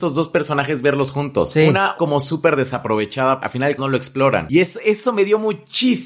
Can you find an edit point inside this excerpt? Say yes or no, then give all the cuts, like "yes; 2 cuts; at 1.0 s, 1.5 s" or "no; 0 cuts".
yes; 3 cuts; at 2.0 s, 3.4 s, 3.8 s